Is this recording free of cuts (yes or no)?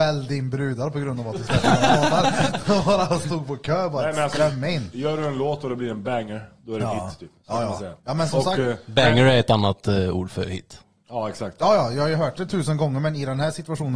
no